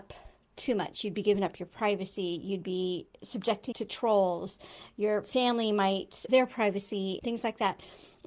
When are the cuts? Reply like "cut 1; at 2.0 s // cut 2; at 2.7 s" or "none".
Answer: cut 1; at 3.7 s // cut 2; at 6.3 s // cut 3; at 7.2 s